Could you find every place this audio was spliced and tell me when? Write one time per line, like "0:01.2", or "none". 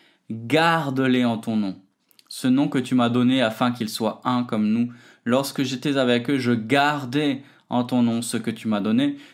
none